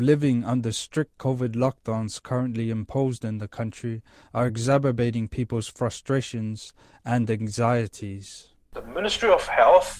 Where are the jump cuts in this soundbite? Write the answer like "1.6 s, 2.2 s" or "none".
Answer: none